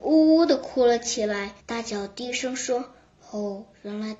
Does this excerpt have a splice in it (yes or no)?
yes